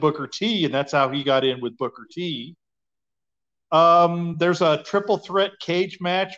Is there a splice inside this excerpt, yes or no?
no